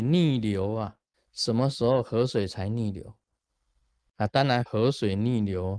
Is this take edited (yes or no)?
yes